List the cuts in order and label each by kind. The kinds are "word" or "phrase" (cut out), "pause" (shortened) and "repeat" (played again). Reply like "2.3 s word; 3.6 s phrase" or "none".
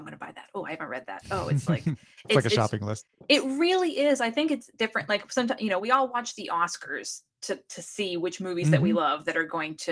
none